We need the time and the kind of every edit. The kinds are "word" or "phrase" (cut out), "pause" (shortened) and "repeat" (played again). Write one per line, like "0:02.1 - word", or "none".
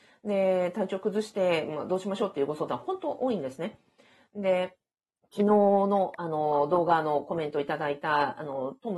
0:05.1 - pause